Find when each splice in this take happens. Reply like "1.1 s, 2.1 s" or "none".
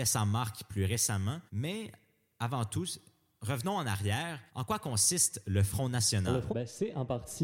1.5 s, 4.5 s, 6.5 s